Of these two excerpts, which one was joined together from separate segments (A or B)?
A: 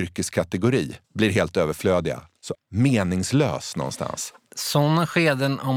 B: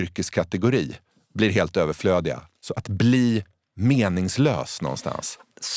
A